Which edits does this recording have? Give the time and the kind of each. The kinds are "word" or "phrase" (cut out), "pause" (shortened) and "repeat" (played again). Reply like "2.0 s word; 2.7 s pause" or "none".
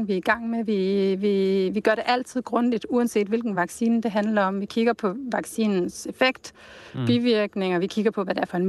none